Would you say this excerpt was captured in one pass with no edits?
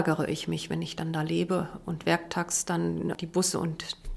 yes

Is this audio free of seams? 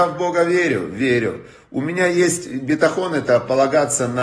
yes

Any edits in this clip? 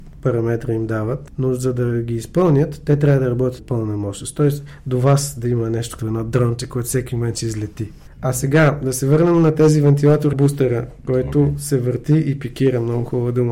yes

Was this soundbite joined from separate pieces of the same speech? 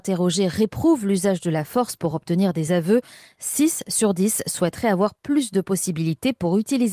no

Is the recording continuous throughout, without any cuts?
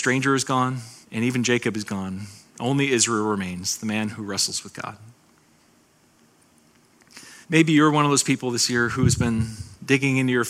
no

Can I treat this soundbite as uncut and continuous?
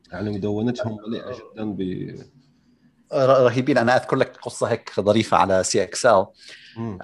yes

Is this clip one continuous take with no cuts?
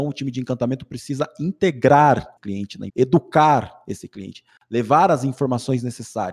no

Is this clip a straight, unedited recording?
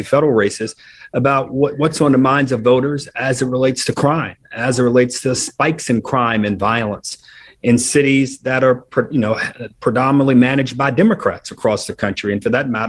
yes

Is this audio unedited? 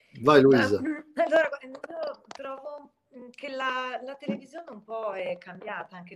yes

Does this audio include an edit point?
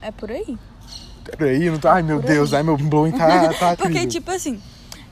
yes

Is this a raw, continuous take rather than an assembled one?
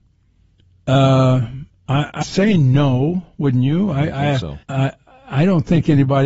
no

